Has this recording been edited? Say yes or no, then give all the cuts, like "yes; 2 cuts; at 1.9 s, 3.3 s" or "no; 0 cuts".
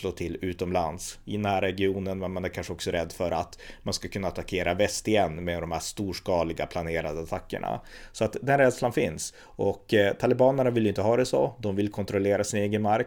no; 0 cuts